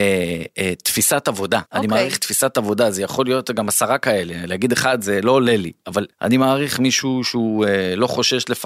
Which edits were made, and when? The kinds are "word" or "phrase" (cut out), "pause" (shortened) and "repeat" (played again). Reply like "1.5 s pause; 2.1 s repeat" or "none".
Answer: 1.7 s pause; 6.1 s pause